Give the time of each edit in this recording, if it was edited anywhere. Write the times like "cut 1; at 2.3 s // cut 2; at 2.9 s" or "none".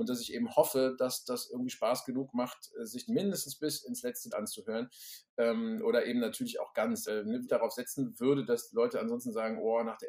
cut 1; at 3.1 s // cut 2; at 4.3 s // cut 3; at 7.1 s // cut 4; at 7.5 s